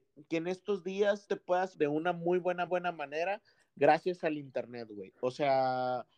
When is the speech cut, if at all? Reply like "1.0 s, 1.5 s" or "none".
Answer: 1.3 s, 1.7 s, 2.7 s